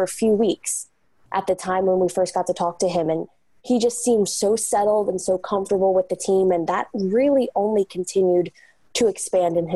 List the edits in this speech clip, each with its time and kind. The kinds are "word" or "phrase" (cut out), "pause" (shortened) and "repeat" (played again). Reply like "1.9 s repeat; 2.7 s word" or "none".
none